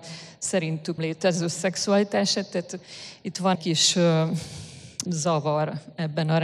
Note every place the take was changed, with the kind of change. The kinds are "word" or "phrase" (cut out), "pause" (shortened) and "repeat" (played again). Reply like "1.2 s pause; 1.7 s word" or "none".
1.0 s word; 3.5 s word; 5.1 s word